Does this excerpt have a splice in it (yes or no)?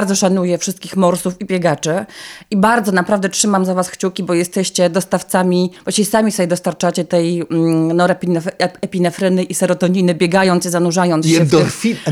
yes